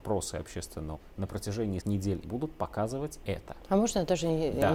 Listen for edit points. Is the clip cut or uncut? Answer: cut